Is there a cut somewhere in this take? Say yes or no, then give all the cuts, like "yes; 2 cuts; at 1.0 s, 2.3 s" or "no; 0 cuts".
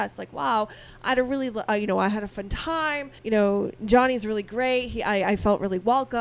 yes; 1 cut; at 3.2 s